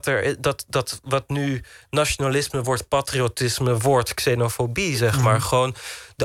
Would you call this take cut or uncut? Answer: uncut